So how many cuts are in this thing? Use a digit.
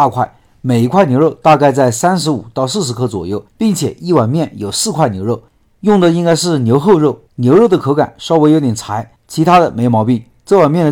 3